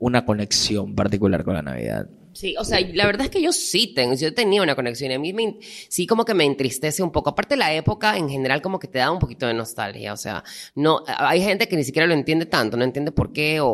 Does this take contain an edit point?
no; 0 cuts

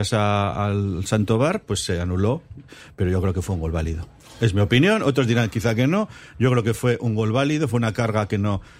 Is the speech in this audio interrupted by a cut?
no; 0 cuts

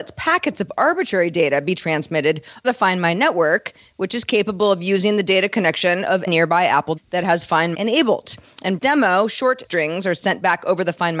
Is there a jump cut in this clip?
yes; 6 cuts; at 2.6 s, 6.3 s, 7.0 s, 7.7 s, 8.8 s, 9.7 s

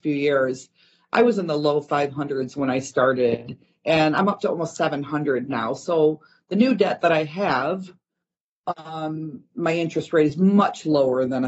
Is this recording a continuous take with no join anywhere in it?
yes; 0 cuts

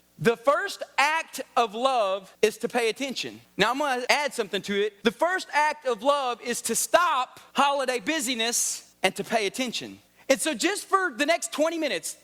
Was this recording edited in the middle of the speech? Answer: no; 0 cuts

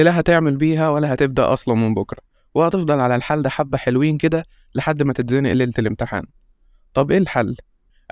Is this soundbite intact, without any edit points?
yes; 0 cuts

